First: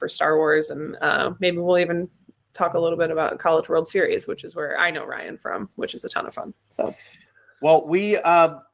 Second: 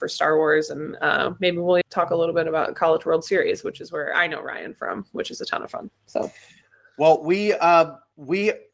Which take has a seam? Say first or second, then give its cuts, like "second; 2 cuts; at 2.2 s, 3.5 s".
second; 1 cut; at 1.8 s